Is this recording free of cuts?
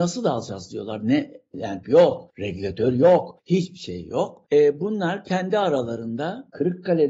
no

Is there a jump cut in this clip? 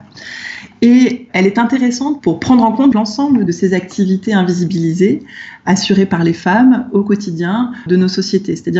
yes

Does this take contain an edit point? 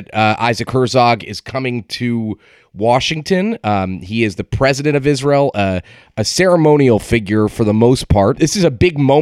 no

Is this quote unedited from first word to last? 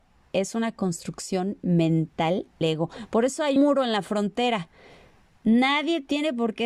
no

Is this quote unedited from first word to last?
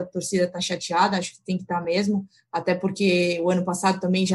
yes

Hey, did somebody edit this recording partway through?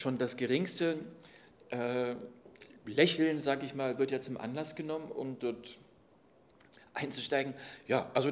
no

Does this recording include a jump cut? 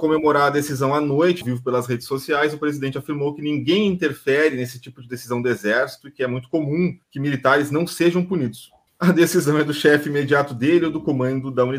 yes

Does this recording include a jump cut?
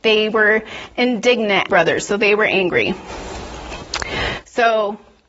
yes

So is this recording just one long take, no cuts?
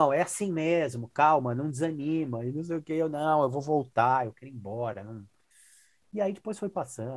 yes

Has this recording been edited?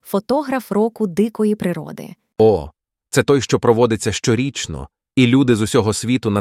no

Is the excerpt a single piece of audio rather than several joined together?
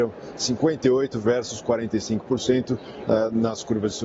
yes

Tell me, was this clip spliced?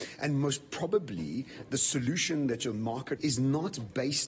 yes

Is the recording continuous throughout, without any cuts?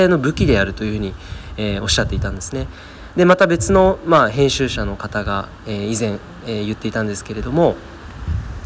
yes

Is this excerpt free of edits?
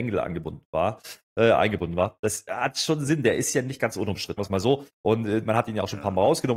no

